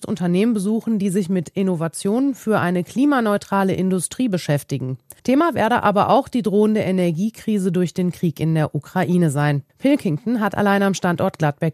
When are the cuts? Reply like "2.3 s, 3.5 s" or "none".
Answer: 5.2 s, 9.7 s

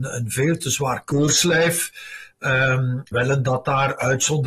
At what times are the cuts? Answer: 3.1 s

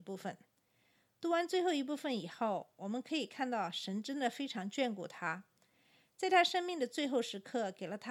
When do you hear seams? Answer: none

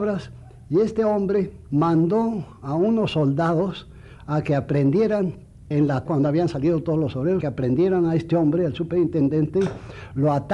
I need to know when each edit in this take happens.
1.7 s, 5.7 s, 6.1 s, 7.4 s

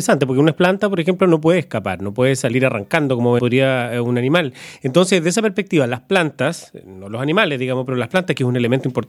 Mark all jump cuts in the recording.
3.4 s

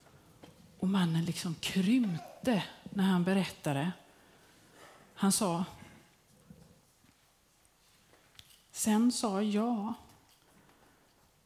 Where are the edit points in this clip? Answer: none

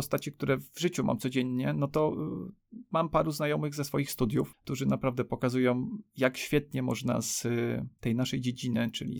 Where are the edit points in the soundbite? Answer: none

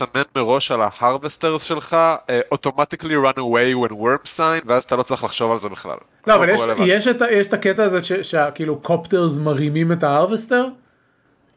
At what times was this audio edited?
none

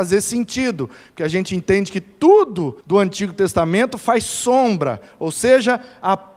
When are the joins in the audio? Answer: 2.8 s

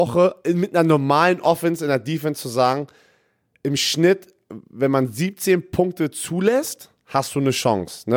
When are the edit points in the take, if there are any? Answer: none

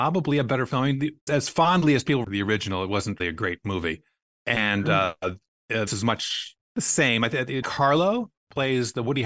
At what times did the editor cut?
1.3 s, 2.2 s, 3.2 s, 5.9 s, 7.6 s

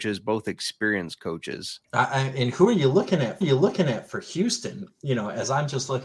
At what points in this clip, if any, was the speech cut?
1.8 s, 3.4 s

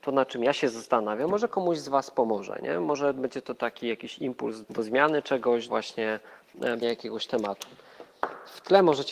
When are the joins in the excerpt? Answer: 4.6 s, 5.7 s, 6.8 s

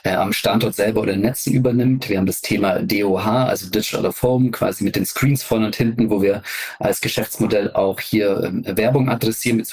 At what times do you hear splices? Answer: none

